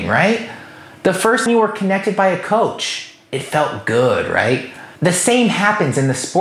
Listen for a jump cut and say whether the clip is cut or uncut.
cut